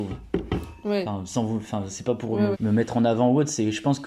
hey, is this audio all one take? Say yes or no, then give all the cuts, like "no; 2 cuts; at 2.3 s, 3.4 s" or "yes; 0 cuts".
no; 1 cut; at 2.5 s